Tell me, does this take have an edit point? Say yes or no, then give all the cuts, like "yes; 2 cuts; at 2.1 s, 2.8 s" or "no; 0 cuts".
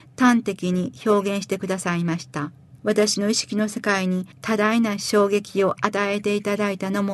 yes; 2 cuts; at 2.8 s, 4.3 s